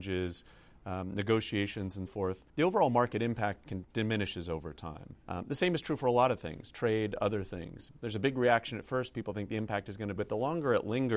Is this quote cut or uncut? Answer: cut